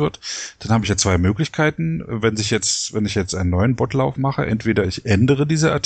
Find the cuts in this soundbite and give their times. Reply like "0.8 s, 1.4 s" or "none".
none